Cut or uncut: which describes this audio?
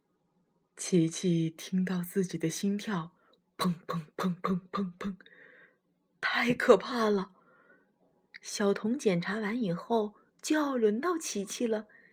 uncut